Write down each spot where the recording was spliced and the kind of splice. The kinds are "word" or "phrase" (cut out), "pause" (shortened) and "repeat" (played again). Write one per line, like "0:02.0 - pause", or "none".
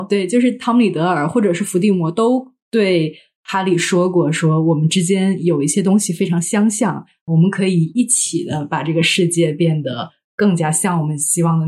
none